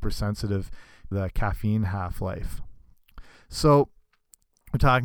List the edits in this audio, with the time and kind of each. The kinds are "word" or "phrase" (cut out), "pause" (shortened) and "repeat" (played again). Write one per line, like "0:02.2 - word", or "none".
0:01.1 - phrase